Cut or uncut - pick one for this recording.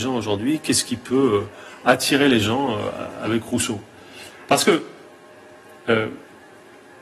uncut